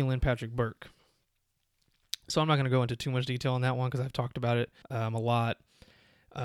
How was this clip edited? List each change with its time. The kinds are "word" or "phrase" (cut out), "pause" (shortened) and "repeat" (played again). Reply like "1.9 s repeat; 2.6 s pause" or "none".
4.8 s pause